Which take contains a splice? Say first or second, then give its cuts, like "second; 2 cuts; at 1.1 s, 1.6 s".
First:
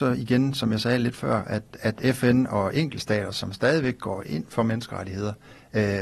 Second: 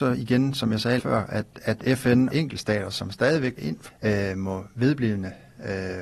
second; 4 cuts; at 1.0 s, 2.3 s, 3.6 s, 3.9 s